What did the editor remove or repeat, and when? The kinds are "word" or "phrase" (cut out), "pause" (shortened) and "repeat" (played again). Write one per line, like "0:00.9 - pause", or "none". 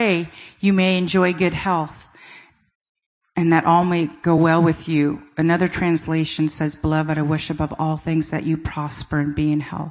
none